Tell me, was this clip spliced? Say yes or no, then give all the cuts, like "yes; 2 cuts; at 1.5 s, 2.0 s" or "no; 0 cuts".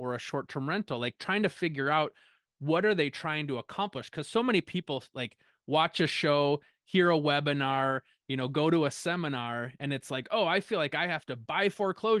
no; 0 cuts